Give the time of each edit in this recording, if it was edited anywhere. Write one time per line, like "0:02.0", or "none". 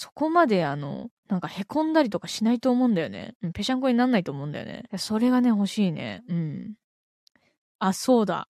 0:01.2
0:04.9